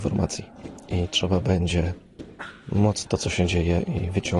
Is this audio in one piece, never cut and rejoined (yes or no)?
no